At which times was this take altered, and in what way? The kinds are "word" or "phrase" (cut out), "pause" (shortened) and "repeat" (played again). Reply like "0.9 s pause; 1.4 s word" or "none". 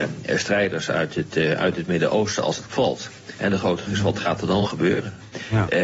2.7 s word; 3.9 s word